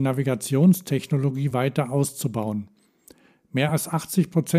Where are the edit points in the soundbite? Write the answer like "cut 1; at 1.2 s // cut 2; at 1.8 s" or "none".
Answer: none